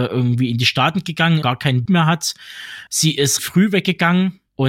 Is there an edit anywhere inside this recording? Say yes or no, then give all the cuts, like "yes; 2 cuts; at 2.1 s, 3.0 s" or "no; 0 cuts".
yes; 4 cuts; at 1.4 s, 1.9 s, 2.9 s, 3.4 s